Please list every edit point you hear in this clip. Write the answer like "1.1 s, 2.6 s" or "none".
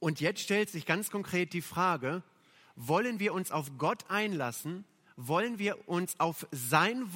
none

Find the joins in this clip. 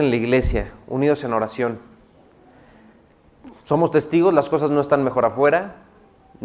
3.6 s

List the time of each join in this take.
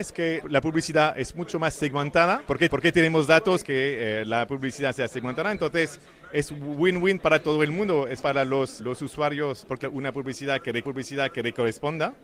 2.7 s, 3.6 s, 8.2 s, 8.8 s, 9.8 s, 10.8 s

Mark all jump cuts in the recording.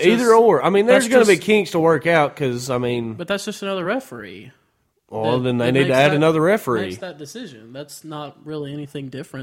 none

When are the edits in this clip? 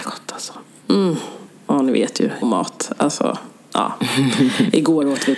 2.4 s

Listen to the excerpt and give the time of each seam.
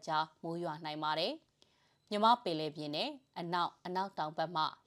1.5 s

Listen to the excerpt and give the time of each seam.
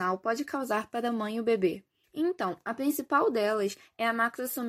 2.0 s

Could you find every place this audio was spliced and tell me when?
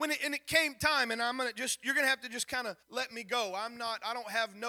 2.8 s

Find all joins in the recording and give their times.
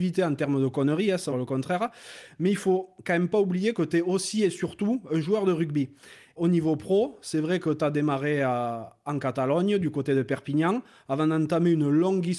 1.3 s

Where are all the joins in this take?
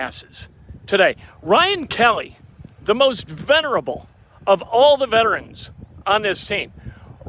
none

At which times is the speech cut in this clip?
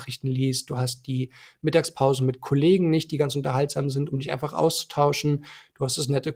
none

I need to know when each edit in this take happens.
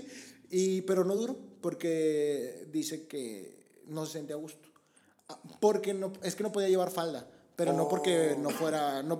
none

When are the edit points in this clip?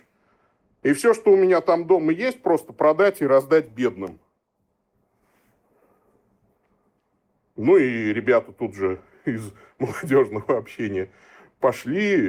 none

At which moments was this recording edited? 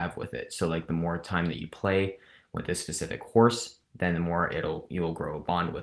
3.8 s

